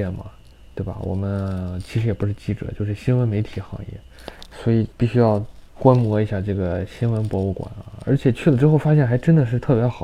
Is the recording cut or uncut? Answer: cut